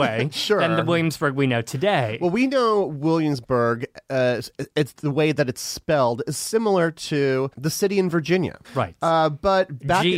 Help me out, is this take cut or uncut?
cut